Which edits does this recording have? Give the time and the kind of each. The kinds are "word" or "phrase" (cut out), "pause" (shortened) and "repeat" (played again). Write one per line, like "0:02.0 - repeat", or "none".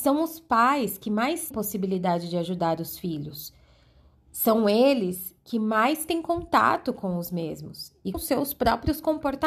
0:01.5 - word
0:08.1 - word

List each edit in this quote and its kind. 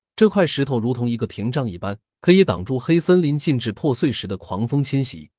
0:02.1 - pause

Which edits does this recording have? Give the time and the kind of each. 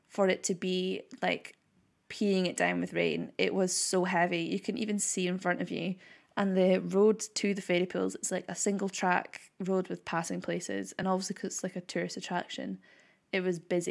none

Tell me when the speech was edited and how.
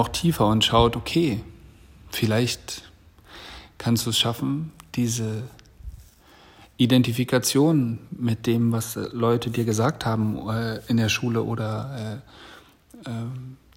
none

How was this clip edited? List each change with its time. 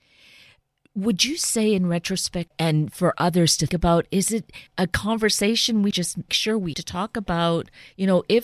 0:02.5 - word
0:03.7 - word
0:04.7 - word
0:05.9 - word
0:06.3 - word
0:06.7 - word

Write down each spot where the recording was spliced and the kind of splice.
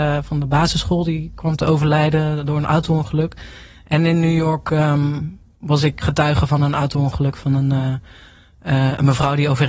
0:05.5 - word
0:06.0 - word

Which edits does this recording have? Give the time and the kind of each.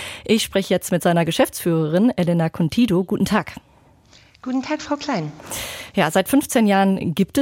none

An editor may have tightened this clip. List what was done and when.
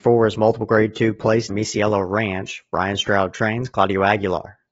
0:01.5 - phrase

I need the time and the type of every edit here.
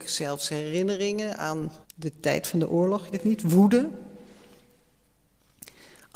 0:01.8 - pause
0:03.1 - word

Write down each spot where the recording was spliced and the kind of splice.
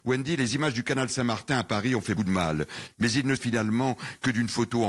0:02.2 - word
0:03.4 - word

